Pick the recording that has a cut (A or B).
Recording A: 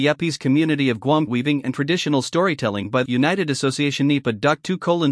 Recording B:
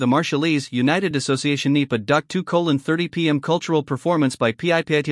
A